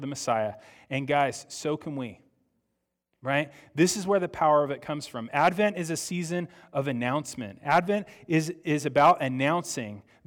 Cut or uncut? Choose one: uncut